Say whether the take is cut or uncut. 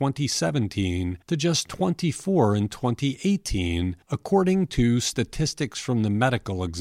cut